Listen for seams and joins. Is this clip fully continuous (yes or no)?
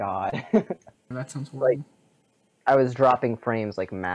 no